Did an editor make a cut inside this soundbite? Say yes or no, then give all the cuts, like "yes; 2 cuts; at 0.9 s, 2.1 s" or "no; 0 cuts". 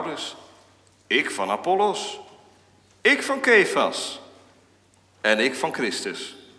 no; 0 cuts